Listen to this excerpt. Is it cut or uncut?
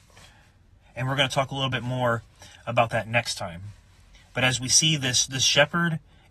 uncut